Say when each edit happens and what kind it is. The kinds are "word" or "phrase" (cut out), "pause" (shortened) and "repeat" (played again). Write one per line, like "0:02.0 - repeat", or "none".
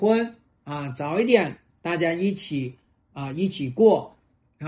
none